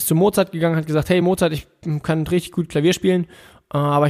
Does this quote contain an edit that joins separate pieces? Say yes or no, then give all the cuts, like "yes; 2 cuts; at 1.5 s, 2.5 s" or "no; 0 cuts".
no; 0 cuts